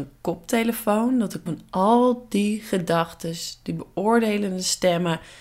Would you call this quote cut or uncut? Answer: cut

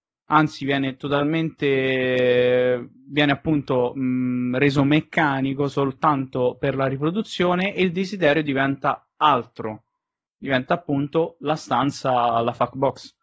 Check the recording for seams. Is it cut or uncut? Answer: uncut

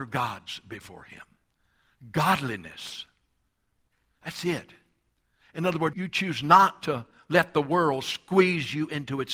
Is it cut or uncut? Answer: cut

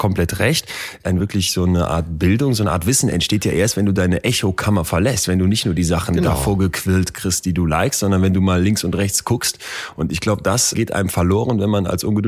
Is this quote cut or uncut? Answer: uncut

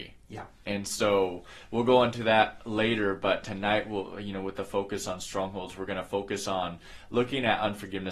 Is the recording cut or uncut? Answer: uncut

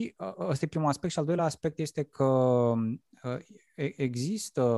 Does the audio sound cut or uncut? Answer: uncut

